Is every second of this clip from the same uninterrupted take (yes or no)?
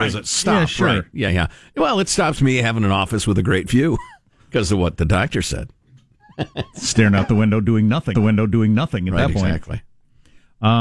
no